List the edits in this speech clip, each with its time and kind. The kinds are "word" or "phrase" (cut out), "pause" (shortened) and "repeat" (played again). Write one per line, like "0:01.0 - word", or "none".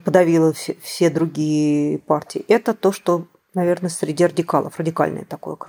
none